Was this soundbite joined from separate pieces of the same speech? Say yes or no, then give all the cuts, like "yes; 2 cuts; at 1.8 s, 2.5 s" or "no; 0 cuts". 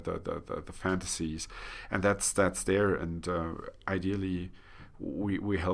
no; 0 cuts